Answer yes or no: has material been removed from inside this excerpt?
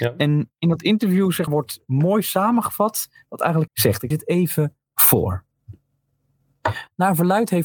yes